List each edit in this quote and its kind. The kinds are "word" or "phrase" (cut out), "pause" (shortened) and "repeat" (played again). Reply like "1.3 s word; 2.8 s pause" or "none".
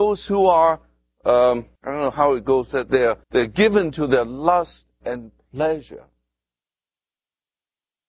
1.8 s pause; 3.2 s pause